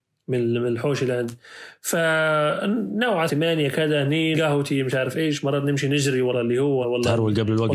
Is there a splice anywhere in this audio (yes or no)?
yes